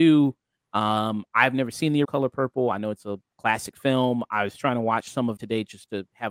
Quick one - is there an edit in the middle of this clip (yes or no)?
yes